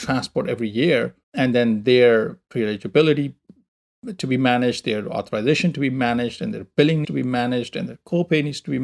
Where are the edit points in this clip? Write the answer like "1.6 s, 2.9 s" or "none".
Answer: 1.2 s, 7.0 s

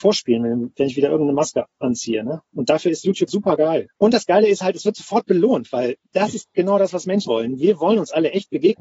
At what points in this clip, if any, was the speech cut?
3.3 s, 3.9 s, 6.0 s, 7.3 s

